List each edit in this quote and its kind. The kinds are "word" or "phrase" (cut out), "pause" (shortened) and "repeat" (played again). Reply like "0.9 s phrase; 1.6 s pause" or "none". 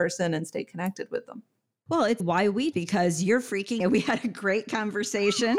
2.2 s word; 2.7 s word; 3.8 s word